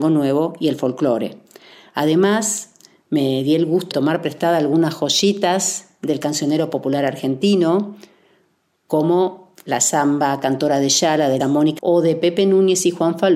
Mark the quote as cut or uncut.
cut